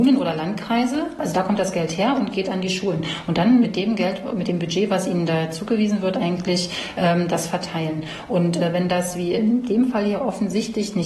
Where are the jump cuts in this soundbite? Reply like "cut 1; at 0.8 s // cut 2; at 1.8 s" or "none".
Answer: cut 1; at 3.6 s

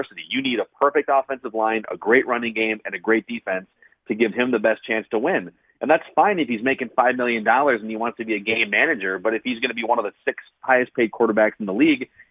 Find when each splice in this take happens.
none

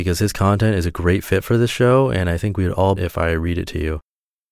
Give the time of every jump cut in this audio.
cut 1; at 3.0 s

